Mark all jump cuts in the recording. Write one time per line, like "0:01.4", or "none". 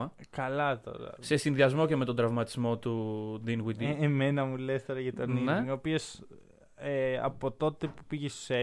none